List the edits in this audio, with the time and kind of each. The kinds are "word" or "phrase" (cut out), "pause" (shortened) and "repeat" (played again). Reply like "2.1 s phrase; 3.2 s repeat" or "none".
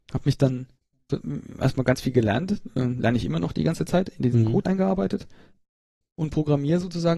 4.6 s word

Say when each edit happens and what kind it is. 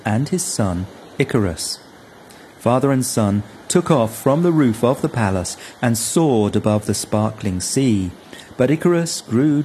none

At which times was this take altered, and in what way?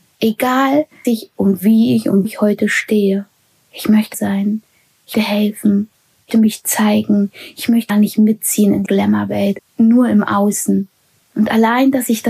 1.0 s word; 2.2 s word; 4.1 s word; 5.1 s word; 6.3 s word; 7.9 s word; 8.9 s word

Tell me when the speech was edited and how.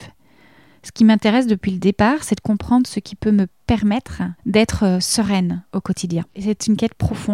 4.4 s pause; 5.7 s pause; 6.3 s pause

